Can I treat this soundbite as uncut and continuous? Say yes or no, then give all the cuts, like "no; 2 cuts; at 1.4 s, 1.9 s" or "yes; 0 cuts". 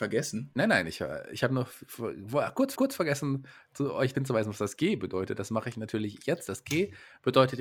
no; 2 cuts; at 2.8 s, 4.1 s